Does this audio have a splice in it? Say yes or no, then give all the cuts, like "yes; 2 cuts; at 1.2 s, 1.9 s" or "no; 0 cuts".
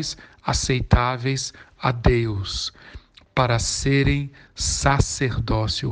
no; 0 cuts